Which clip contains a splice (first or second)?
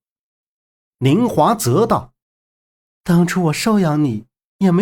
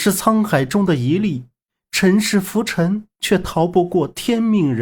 first